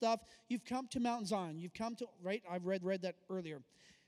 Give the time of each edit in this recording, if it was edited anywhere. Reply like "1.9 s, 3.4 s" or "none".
2.8 s